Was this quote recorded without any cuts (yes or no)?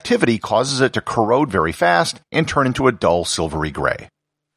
yes